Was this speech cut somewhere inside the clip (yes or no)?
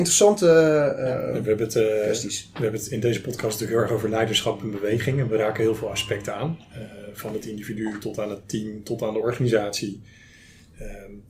no